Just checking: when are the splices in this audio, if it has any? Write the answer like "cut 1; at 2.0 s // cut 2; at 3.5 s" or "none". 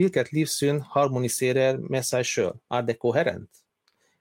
cut 1; at 2.6 s

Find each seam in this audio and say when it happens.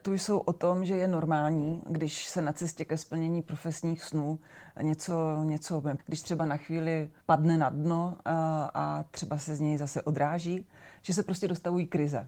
cut 1; at 6.0 s // cut 2; at 7.2 s

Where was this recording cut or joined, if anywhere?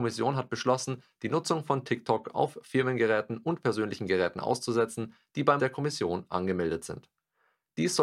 cut 1; at 5.6 s

